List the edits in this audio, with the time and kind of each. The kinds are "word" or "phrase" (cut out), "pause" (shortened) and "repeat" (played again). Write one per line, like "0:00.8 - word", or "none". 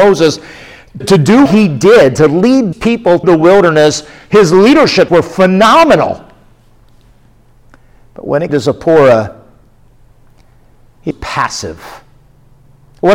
0:01.0 - word
0:01.5 - word
0:02.7 - word
0:03.2 - word
0:05.1 - word
0:08.5 - word
0:11.1 - word